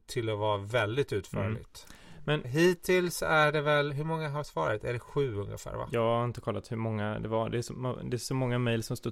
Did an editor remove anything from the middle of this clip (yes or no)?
yes